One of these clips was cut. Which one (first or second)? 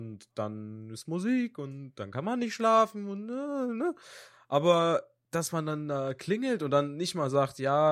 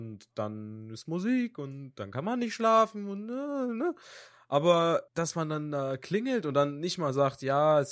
second